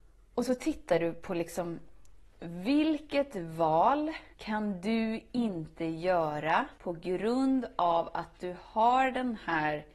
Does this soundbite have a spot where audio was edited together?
yes; 2 cuts; at 4.3 s, 6.8 s

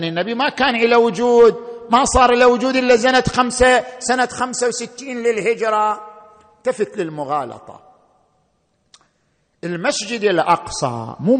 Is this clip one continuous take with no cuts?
yes; 0 cuts

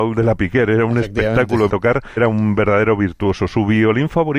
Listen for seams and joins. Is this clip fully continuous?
no; 2 cuts; at 1.7 s, 2.2 s

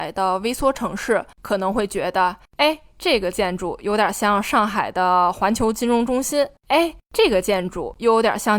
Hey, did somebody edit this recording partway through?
no; 0 cuts

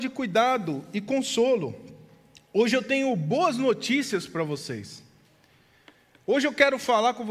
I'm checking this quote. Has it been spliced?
no; 0 cuts

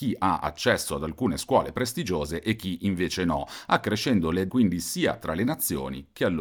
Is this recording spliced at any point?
yes; 1 cut; at 4.5 s

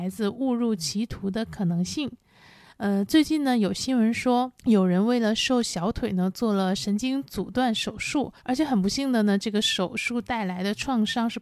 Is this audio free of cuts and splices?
no; 2 cuts; at 4.6 s, 8.4 s

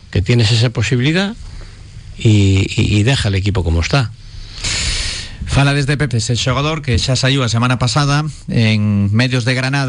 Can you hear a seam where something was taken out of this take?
yes; 1 cut; at 6.1 s

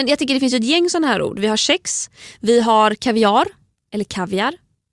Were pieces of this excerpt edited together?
no; 0 cuts

